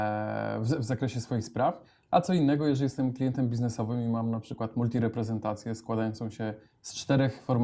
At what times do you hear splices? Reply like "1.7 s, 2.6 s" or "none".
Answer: none

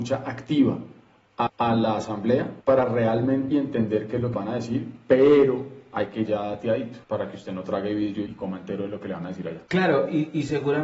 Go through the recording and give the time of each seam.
1.5 s, 2.6 s, 3.5 s, 4.3 s, 6.3 s, 7.0 s, 8.3 s, 9.7 s

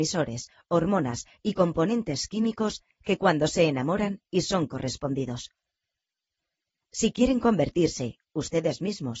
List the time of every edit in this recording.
none

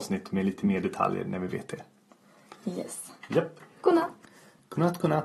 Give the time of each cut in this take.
none

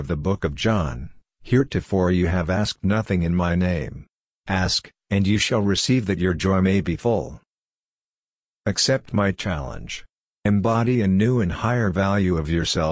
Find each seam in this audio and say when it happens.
none

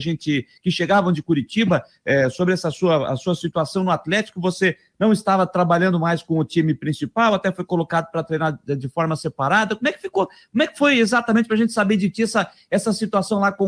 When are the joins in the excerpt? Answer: none

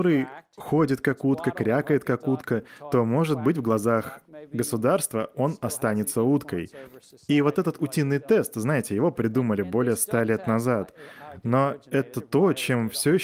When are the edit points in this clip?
none

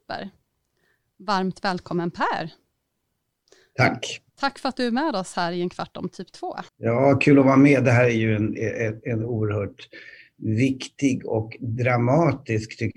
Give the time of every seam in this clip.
4.3 s, 6.7 s

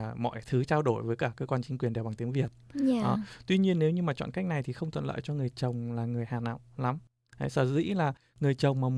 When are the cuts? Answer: none

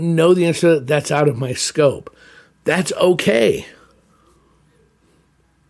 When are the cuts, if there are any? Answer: none

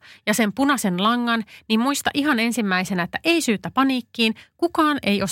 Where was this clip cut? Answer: none

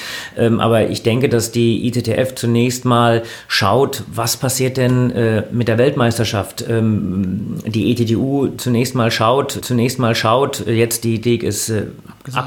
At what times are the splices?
9.6 s, 11.2 s

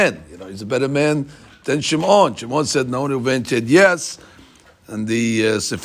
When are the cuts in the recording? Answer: none

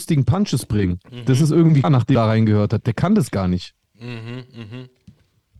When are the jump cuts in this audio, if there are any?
1.8 s, 2.1 s

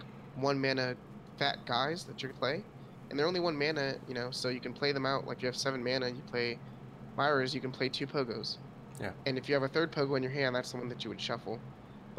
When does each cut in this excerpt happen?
2.3 s, 5.4 s

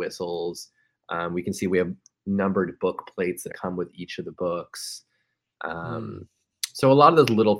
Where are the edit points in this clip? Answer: 3.5 s

